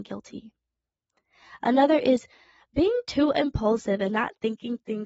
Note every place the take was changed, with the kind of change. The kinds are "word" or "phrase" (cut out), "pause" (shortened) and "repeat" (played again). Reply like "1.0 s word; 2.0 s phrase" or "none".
none